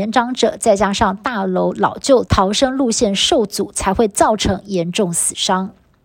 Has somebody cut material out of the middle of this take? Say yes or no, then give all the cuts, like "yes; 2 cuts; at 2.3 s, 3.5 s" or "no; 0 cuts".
yes; 1 cut; at 2.3 s